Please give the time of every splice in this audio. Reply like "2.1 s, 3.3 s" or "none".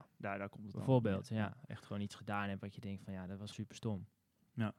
3.5 s